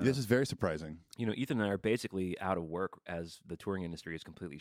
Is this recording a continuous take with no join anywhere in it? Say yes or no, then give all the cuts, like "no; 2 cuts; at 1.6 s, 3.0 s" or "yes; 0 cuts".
yes; 0 cuts